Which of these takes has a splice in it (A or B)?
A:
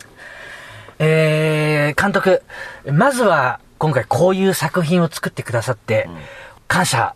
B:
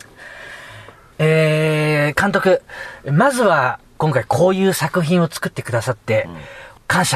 A